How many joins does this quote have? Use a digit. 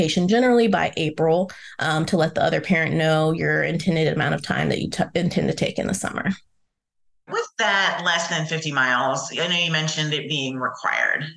0